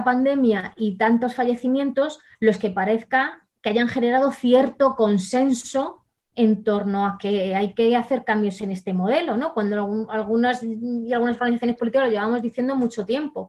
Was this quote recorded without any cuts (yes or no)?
yes